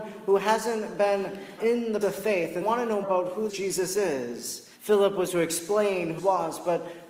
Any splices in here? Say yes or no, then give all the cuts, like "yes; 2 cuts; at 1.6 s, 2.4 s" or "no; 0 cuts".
yes; 8 cuts; at 1.6 s, 2.0 s, 2.6 s, 3.0 s, 3.5 s, 4.8 s, 5.3 s, 6.2 s